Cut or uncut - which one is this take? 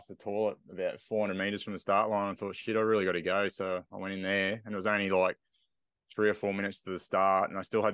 uncut